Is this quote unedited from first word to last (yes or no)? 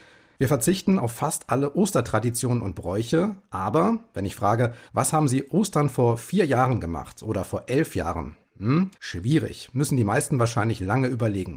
no